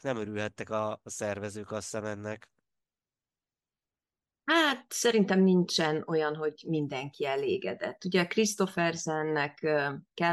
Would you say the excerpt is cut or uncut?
uncut